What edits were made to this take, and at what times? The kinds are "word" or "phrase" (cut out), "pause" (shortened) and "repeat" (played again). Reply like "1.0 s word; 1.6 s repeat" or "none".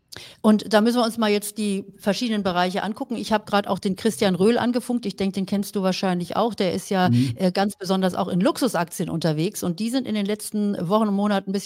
none